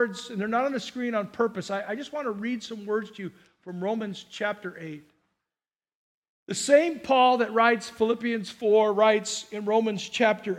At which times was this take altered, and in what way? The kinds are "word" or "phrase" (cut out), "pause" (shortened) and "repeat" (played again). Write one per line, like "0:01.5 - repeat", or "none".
none